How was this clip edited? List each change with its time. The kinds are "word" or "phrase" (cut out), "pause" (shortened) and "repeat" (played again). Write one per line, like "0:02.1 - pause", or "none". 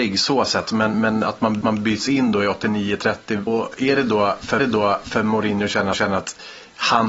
0:00.9 - word
0:01.6 - repeat
0:03.5 - word
0:04.6 - repeat
0:05.9 - repeat